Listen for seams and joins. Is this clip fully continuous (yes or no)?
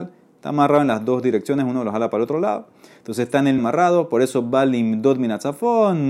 no